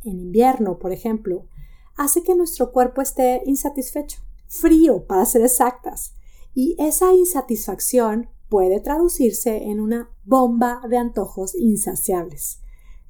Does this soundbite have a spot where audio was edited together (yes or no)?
no